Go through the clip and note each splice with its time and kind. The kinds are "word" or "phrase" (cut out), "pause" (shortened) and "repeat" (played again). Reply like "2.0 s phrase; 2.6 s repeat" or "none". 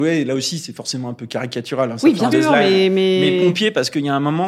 2.3 s word